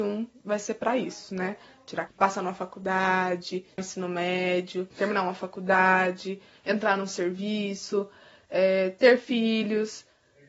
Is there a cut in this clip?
yes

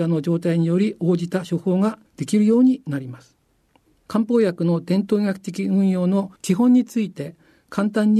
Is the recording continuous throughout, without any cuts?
no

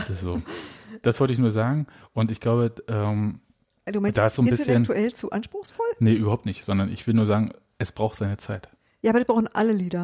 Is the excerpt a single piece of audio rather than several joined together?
yes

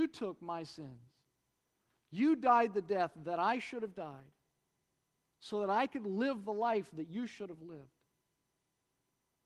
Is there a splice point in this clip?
no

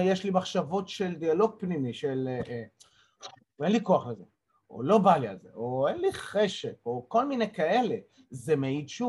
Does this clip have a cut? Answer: no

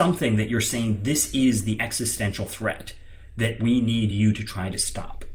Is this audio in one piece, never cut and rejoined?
yes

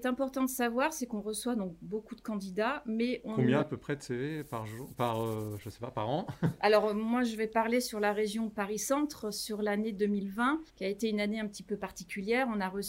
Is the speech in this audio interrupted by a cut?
yes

